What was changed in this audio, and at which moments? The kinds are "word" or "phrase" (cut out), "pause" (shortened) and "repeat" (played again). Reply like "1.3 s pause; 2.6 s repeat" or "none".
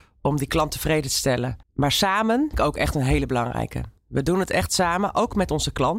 1.6 s pause; 2.5 s word; 4.0 s pause